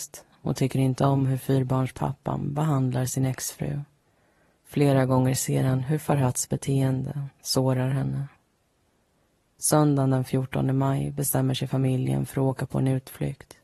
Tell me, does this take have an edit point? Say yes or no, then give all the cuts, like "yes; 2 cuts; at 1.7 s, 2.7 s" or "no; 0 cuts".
no; 0 cuts